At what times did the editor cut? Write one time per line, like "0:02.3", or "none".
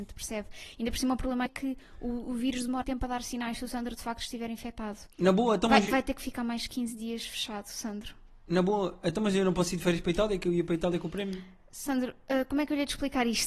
0:01.5
0:02.8
0:05.1